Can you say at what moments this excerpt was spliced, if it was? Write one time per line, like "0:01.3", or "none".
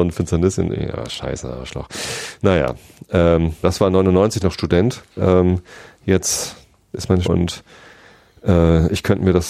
0:03.6
0:04.4
0:05.1
0:07.2